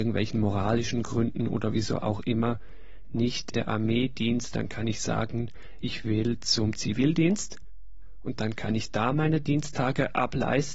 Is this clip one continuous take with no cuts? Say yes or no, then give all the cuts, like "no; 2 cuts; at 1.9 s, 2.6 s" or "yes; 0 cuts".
no; 2 cuts; at 3.5 s, 4.5 s